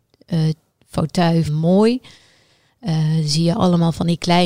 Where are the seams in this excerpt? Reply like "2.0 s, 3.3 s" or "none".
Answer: 1.5 s